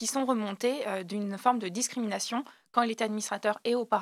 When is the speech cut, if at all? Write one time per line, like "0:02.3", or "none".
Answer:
none